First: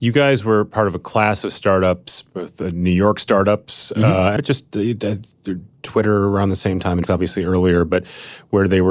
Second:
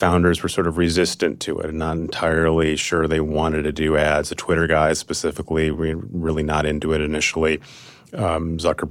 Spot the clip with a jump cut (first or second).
first